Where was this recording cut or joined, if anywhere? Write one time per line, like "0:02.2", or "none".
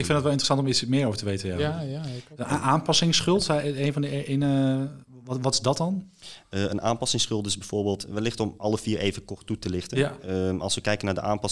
none